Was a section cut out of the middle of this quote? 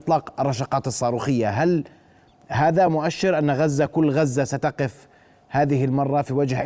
no; 0 cuts

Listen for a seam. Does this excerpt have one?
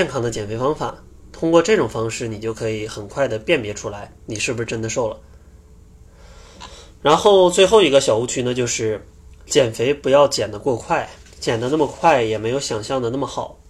yes; 1 cut; at 11.3 s

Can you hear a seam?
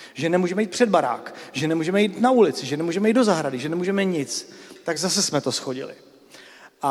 no; 0 cuts

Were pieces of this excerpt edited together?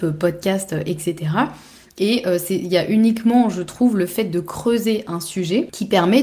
no; 0 cuts

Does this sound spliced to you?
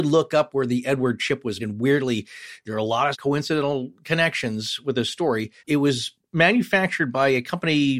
yes; 3 cuts; at 1.6 s, 3.1 s, 5.6 s

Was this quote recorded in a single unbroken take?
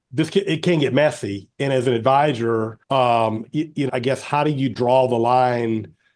no; 2 cuts; at 2.8 s, 3.9 s

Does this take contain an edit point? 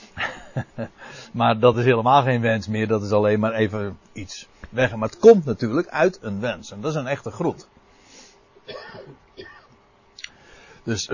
no; 0 cuts

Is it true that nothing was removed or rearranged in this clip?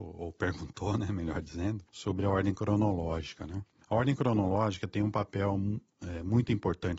no; 2 cuts; at 1.9 s, 3.8 s

